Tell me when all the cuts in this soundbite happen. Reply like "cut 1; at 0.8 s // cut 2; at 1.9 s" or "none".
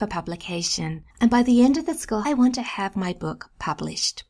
cut 1; at 1.1 s // cut 2; at 2.2 s